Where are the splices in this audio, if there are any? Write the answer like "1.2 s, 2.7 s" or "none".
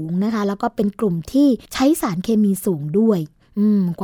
1.6 s